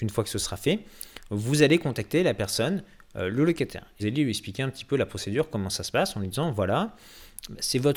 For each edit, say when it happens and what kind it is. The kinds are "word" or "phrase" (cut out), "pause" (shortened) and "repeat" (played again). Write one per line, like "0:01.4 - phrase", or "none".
0:04.0 - word